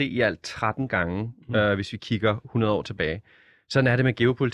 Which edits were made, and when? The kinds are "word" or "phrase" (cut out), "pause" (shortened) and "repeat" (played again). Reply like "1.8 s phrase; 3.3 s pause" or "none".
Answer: none